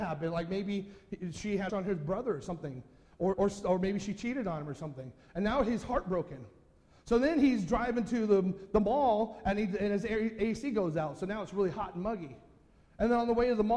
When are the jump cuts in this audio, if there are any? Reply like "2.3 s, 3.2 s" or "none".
1.7 s, 3.3 s